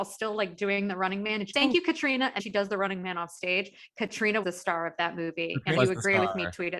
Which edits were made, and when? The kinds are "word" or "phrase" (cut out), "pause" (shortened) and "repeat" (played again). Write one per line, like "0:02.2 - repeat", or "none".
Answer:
0:01.5 - word
0:02.4 - word
0:04.4 - word
0:05.8 - word

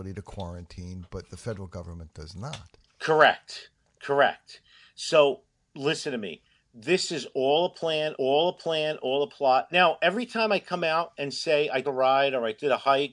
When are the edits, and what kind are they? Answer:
0:02.9 - pause
0:08.2 - repeat
0:11.8 - word

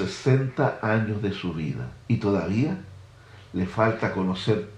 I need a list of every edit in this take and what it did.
0:02.0 - pause

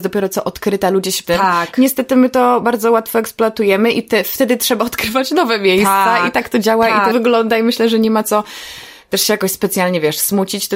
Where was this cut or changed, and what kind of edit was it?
0:01.2 - phrase
0:07.1 - phrase

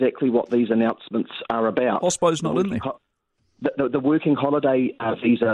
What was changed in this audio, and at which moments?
none

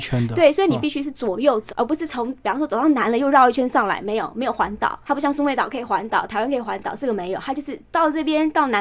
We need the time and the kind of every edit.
0:01.7 - word
0:05.0 - pause

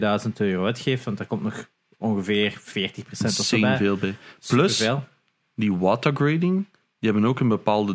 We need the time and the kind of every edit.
none

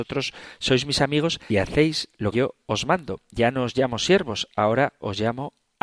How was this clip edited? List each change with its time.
0:01.5 - word
0:02.3 - word

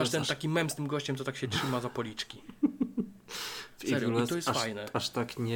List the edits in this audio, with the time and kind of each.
none

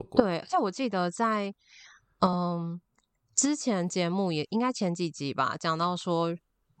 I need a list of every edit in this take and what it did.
none

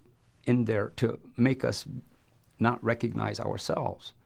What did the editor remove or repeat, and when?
none

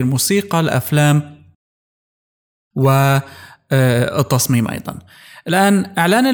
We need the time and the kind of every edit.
none

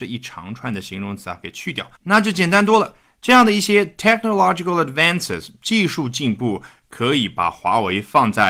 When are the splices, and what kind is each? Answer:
0:02.0 - pause

